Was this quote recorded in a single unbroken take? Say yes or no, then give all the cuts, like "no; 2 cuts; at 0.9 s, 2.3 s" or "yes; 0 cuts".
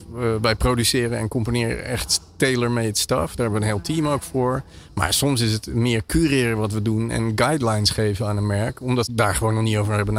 no; 1 cut; at 9.0 s